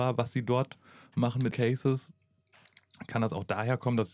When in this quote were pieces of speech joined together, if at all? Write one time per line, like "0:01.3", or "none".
0:01.5